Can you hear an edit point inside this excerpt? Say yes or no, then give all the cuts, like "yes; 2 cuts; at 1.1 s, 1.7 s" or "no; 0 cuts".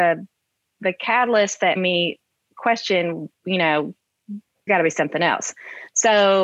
yes; 2 cuts; at 1.8 s, 4.7 s